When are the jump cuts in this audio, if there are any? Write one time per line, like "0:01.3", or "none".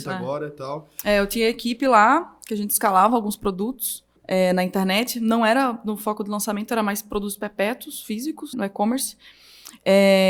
0:04.2
0:08.5